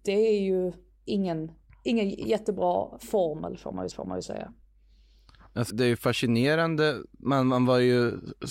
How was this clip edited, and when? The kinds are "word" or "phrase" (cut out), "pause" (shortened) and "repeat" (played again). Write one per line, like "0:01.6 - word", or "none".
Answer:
0:03.9 - repeat
0:05.7 - word